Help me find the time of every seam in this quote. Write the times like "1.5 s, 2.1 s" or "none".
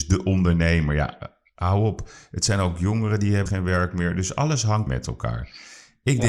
3.5 s, 4.9 s